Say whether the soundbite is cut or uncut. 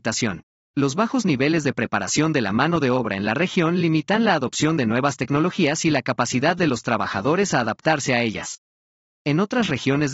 uncut